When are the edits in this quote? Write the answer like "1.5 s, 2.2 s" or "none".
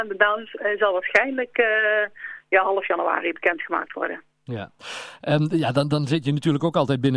none